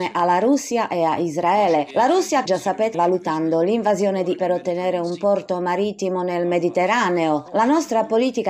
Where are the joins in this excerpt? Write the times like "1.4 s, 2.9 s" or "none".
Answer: 2.5 s, 2.9 s, 4.4 s